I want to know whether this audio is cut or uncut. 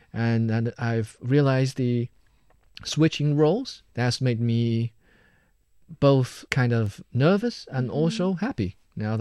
cut